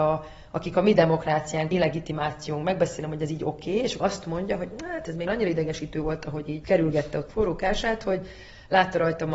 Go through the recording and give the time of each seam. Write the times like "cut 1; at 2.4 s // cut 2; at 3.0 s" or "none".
cut 1; at 1.7 s // cut 2; at 4.0 s // cut 3; at 5.3 s // cut 4; at 6.6 s // cut 5; at 7.3 s